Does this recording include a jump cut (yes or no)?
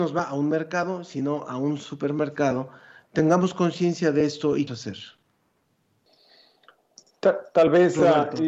yes